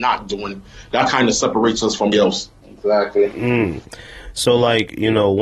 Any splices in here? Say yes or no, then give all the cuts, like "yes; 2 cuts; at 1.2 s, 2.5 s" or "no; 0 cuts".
yes; 1 cut; at 2.1 s